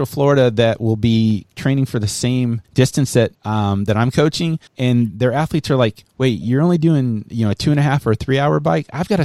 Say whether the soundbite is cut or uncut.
cut